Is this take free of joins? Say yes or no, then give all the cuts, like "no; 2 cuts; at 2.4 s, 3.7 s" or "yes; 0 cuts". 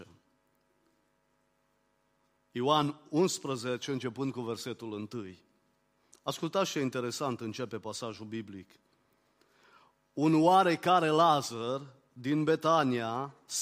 yes; 0 cuts